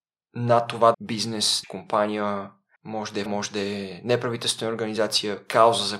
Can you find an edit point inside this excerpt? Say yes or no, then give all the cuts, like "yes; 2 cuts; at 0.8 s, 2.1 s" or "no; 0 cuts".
yes; 4 cuts; at 0.9 s, 1.6 s, 2.8 s, 3.3 s